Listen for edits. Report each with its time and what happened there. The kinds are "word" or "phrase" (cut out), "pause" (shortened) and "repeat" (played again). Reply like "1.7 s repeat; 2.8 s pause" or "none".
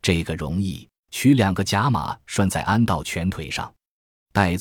1.0 s pause